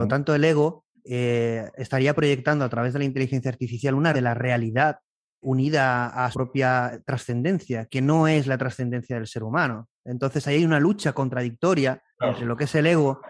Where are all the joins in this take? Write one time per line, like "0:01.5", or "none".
0:00.9
0:04.1
0:05.4
0:06.3
0:12.1